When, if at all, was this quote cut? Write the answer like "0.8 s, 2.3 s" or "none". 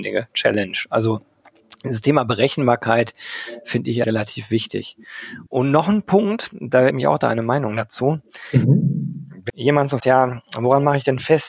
4.0 s, 5.5 s, 6.9 s, 9.5 s, 10.0 s